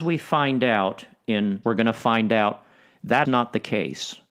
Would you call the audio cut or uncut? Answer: cut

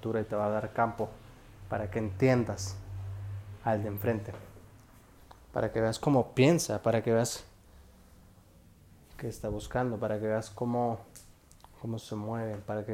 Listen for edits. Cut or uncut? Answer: uncut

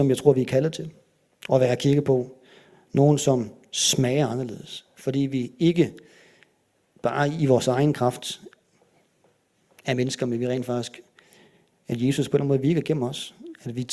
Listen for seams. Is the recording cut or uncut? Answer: uncut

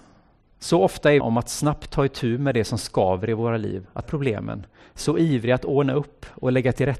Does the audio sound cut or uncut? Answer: cut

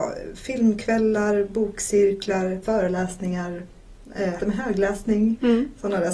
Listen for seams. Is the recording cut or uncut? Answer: cut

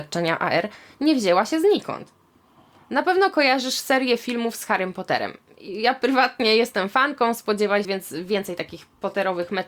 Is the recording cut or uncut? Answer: cut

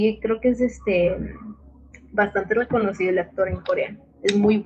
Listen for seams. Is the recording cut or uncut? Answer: uncut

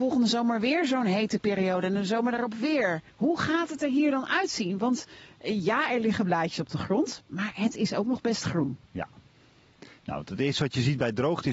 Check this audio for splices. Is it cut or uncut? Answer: cut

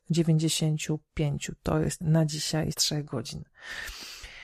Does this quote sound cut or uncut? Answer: cut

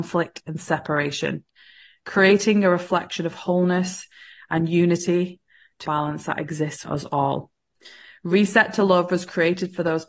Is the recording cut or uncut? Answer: cut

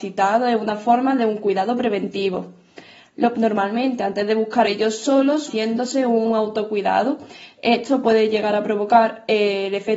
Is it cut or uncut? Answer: cut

